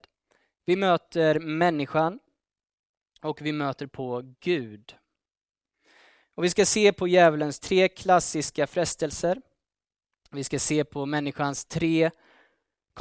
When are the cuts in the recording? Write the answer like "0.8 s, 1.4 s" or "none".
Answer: none